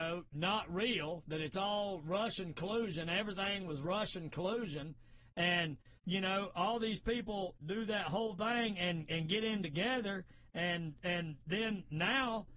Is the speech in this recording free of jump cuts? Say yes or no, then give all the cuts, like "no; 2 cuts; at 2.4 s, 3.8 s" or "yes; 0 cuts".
no; 1 cut; at 6.0 s